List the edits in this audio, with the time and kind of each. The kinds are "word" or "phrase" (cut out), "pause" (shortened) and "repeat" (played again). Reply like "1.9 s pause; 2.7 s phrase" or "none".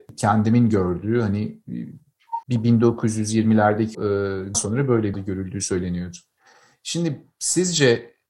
2.4 s pause; 3.9 s word; 4.5 s phrase; 5.1 s phrase